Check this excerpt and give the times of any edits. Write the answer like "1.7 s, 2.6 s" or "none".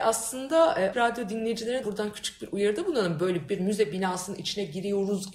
0.9 s, 1.8 s, 3.5 s